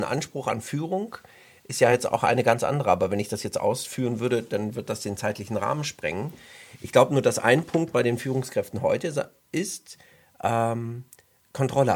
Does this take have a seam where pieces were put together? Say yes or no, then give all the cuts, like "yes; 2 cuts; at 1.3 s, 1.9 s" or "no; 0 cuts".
no; 0 cuts